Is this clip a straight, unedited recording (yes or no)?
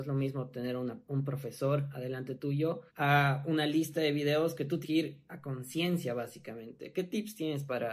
no